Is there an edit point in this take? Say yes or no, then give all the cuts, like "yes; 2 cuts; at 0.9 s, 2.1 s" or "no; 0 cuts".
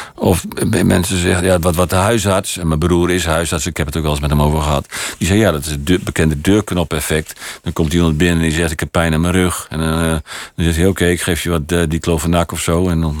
no; 0 cuts